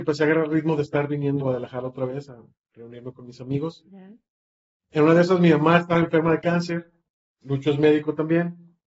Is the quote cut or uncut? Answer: cut